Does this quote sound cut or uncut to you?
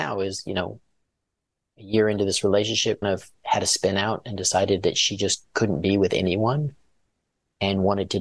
cut